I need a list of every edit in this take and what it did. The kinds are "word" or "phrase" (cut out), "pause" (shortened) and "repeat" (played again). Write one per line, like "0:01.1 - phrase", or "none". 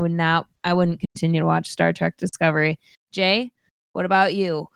none